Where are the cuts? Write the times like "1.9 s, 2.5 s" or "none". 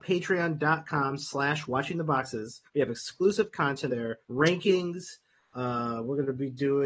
2.7 s, 3.9 s, 4.2 s